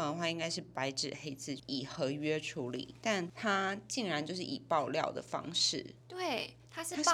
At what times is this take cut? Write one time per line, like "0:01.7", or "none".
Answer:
0:06.0

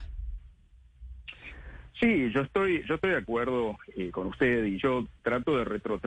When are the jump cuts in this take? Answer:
none

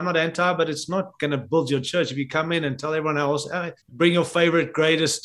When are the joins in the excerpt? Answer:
0:03.8

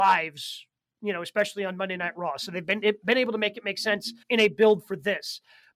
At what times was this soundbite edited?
0:04.2

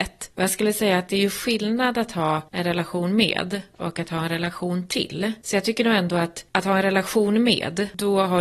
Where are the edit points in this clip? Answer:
none

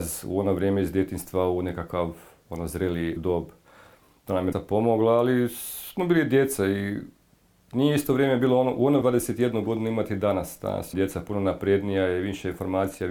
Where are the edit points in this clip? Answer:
0:03.2
0:04.5
0:09.0
0:10.9

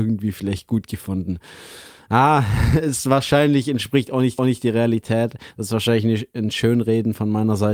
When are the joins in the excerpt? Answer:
0:04.4

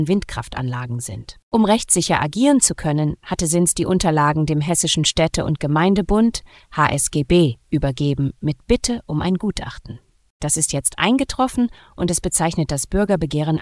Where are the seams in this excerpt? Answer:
none

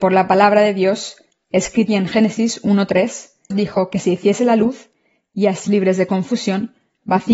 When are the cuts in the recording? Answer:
0:01.9
0:03.5
0:05.7

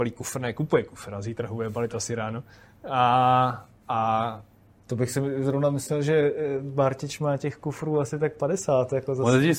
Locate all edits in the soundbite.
none

